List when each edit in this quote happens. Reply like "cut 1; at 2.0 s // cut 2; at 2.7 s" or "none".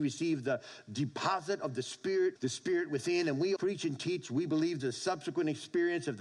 cut 1; at 2.4 s // cut 2; at 3.6 s // cut 3; at 4.8 s